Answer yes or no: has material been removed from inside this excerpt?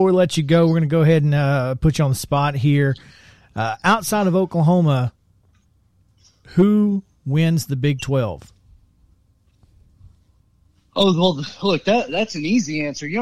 no